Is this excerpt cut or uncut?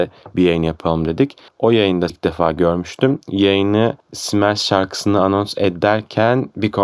cut